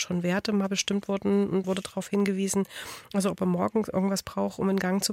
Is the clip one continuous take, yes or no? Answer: no